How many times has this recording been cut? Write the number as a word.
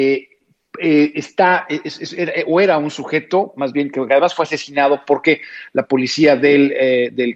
zero